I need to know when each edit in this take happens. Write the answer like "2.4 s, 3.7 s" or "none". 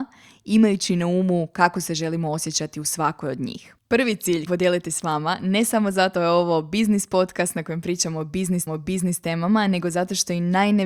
3.8 s, 4.5 s, 6.1 s, 8.7 s